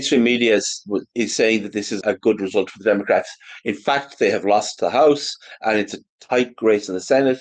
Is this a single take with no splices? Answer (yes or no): no